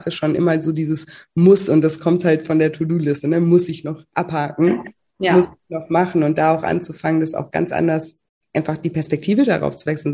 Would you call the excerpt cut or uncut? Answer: uncut